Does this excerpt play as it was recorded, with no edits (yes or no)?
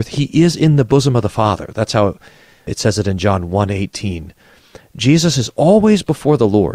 yes